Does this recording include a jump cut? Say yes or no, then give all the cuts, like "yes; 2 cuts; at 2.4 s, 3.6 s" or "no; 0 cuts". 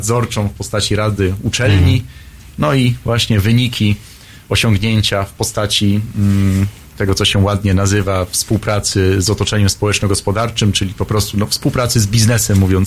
no; 0 cuts